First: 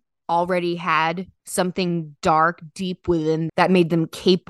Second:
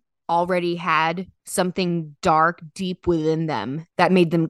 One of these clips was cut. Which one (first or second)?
first